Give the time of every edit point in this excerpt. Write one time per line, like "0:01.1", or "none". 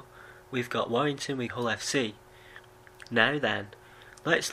0:01.5